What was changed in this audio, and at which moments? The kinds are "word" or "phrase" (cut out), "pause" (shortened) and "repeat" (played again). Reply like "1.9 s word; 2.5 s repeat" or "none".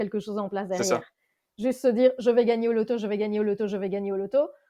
none